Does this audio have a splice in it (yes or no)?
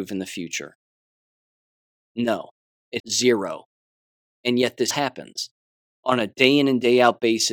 yes